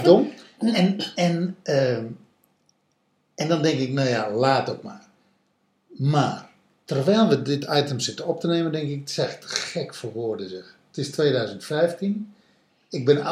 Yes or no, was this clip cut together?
no